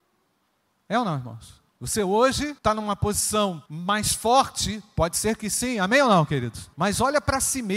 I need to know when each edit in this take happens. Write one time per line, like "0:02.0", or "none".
0:01.7
0:02.6
0:03.7
0:06.7